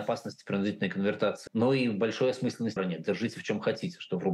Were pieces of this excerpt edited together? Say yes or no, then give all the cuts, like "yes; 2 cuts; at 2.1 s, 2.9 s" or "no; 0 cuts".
yes; 2 cuts; at 1.5 s, 2.8 s